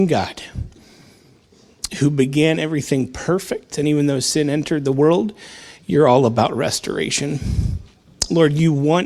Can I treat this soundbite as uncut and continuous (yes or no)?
yes